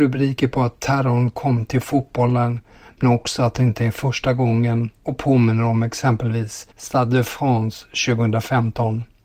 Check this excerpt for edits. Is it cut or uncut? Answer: cut